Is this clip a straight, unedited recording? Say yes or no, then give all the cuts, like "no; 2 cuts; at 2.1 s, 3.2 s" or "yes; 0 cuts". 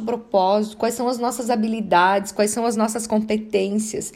yes; 0 cuts